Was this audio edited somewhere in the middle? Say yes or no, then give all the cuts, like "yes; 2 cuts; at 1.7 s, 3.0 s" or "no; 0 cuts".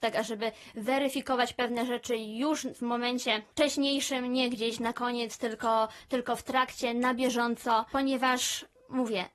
no; 0 cuts